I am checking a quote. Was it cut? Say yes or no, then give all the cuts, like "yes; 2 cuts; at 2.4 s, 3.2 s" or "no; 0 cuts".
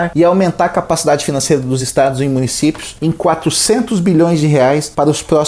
no; 0 cuts